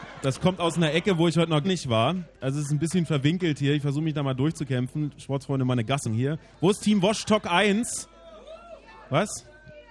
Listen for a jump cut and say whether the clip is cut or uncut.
cut